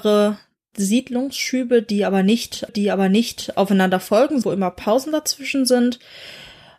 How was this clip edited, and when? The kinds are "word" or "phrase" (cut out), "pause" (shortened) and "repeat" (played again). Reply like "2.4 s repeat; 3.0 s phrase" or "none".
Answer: 2.7 s repeat; 4.4 s word